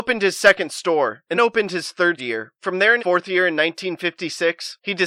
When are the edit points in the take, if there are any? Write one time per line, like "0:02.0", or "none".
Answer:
0:01.3
0:02.2
0:03.0